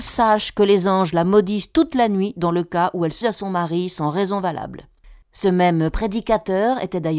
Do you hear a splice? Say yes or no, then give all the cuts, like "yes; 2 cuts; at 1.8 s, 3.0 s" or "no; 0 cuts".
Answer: yes; 2 cuts; at 3.2 s, 5.2 s